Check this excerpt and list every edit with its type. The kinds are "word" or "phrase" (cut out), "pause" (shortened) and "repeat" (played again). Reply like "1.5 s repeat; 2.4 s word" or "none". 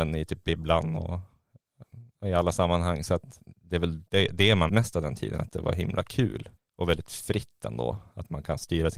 4.1 s pause; 4.7 s word; 6.6 s pause